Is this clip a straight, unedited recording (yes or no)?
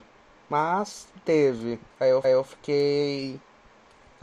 no